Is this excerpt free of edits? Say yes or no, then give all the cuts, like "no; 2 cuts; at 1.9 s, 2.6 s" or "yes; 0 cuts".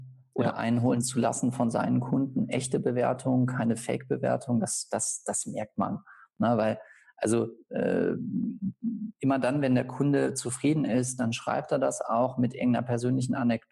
yes; 0 cuts